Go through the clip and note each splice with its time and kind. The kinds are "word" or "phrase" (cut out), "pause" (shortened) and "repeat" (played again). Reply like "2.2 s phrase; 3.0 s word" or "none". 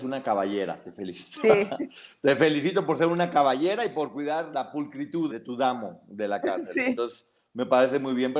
4.5 s word; 5.3 s word